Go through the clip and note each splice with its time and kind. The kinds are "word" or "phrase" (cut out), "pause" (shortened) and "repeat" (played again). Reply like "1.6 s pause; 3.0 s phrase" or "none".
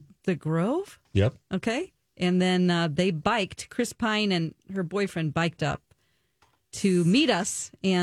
1.0 s pause

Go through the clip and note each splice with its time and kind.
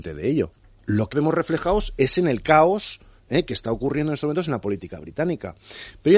1.1 s phrase

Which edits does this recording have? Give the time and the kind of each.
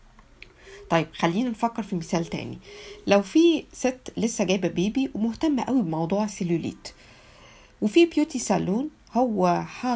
none

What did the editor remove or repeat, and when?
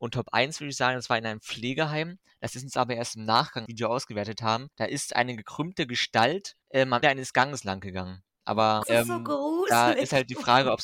3.7 s phrase; 4.7 s pause; 6.6 s pause; 7.0 s word; 8.8 s phrase

